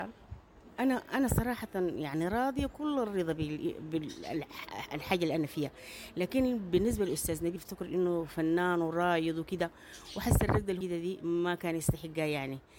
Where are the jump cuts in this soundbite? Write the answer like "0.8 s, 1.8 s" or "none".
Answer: 7.6 s, 10.8 s